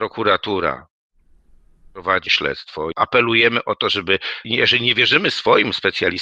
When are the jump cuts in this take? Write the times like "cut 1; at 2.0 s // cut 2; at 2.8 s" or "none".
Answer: cut 1; at 2.3 s // cut 2; at 2.9 s // cut 3; at 4.4 s